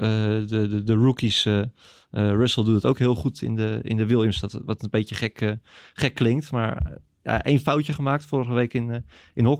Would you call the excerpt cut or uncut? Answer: uncut